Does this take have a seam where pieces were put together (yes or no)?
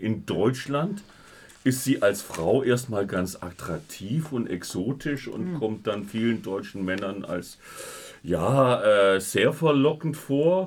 no